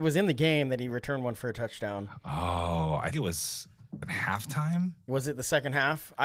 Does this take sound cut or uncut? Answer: cut